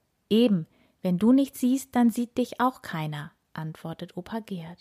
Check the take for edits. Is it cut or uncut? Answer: uncut